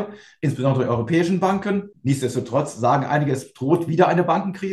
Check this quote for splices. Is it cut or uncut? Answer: cut